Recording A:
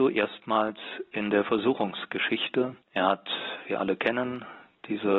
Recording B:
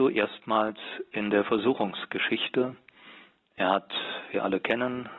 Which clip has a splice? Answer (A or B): A